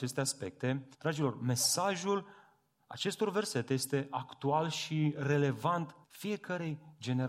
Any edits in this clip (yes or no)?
yes